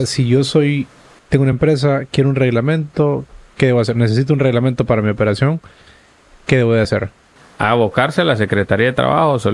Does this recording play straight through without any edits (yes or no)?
yes